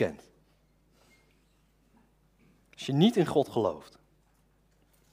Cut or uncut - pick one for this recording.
uncut